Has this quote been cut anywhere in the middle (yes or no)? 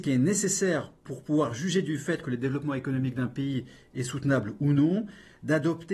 no